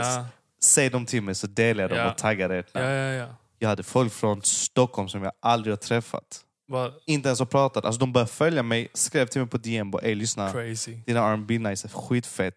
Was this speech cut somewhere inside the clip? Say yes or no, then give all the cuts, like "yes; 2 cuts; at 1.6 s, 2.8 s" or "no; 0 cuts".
no; 0 cuts